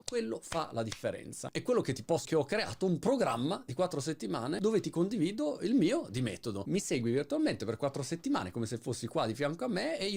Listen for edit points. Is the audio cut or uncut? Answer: cut